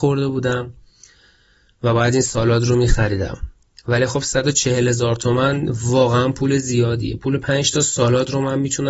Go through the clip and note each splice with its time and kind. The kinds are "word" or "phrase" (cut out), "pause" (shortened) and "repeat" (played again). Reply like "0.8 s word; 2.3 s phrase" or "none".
none